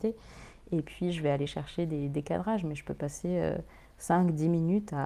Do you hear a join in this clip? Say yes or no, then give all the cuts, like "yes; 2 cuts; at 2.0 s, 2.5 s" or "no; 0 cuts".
no; 0 cuts